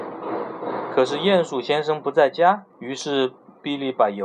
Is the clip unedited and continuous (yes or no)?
no